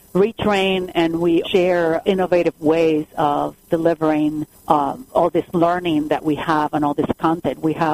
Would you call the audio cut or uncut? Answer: cut